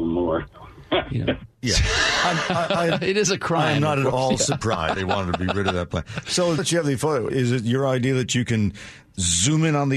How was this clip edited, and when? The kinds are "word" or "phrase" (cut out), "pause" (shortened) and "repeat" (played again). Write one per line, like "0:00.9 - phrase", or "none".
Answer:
0:05.0 - word
0:06.6 - word
0:07.3 - word